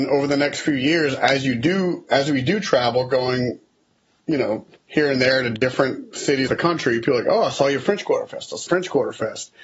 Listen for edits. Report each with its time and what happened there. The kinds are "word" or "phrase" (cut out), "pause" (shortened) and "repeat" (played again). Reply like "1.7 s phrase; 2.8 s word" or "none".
6.5 s word; 8.7 s word